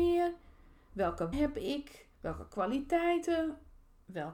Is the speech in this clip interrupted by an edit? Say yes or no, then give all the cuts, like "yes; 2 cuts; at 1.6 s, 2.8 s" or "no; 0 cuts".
yes; 2 cuts; at 1.3 s, 2.1 s